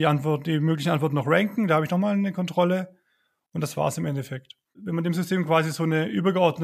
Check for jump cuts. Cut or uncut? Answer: uncut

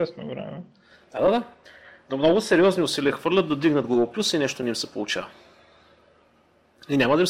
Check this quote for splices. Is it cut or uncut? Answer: uncut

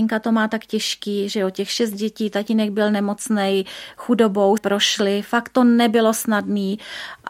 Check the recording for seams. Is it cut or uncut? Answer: cut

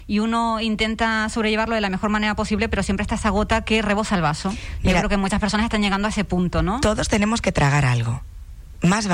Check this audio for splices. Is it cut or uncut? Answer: uncut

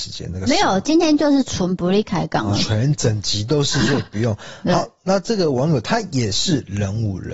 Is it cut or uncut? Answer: uncut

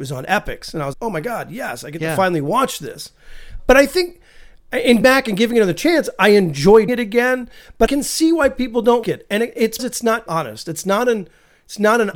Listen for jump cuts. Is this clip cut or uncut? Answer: cut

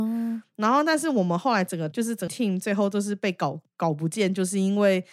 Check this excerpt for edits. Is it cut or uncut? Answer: cut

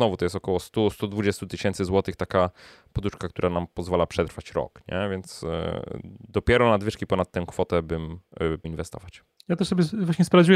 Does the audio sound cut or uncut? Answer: cut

